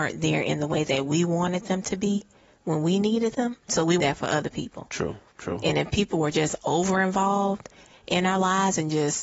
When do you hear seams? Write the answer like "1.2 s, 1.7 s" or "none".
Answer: 4.0 s